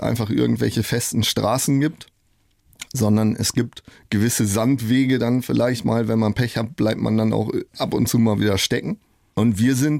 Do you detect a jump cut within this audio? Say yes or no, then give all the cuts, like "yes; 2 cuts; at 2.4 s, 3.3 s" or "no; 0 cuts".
no; 0 cuts